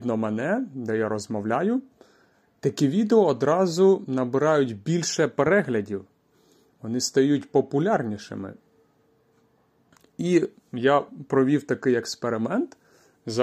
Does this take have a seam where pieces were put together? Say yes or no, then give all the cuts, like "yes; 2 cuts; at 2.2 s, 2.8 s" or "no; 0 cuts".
no; 0 cuts